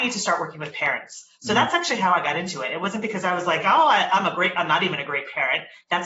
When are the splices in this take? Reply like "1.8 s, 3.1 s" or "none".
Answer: none